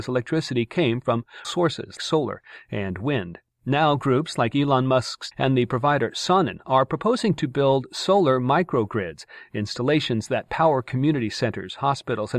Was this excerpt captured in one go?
no; 3 cuts; at 1.4 s, 2.0 s, 5.3 s

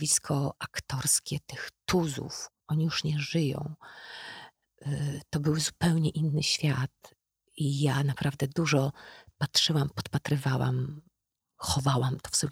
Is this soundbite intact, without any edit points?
yes; 0 cuts

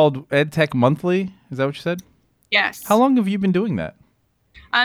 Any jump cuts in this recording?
no; 0 cuts

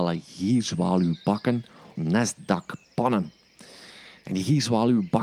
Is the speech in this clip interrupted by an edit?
yes; 1 cut; at 2.0 s

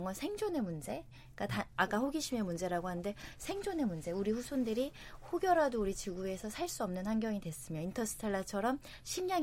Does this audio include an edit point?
no; 0 cuts

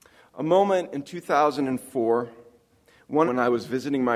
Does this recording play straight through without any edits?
no; 1 cut; at 3.3 s

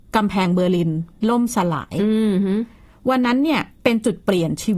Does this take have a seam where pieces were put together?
yes; 1 cut; at 3.7 s

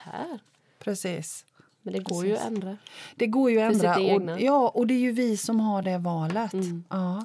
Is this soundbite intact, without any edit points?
yes; 0 cuts

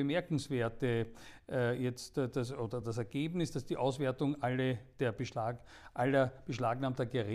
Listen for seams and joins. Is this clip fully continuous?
yes; 0 cuts

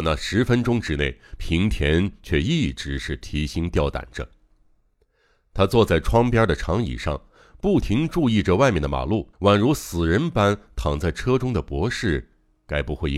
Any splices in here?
yes; 1 cut; at 9.3 s

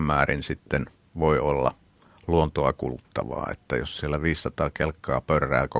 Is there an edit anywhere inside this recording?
no; 0 cuts

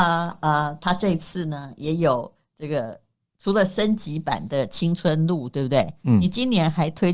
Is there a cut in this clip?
no; 0 cuts

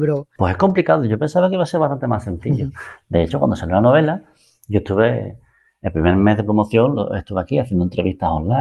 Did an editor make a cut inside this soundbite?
no; 0 cuts

